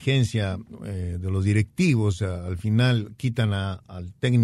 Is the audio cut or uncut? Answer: uncut